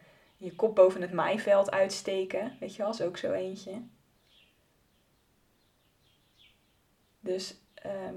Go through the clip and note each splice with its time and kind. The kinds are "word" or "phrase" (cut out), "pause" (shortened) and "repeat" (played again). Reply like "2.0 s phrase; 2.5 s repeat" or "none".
none